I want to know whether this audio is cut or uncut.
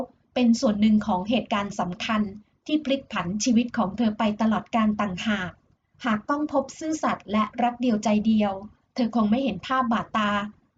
uncut